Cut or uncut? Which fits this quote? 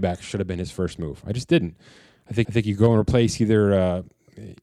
cut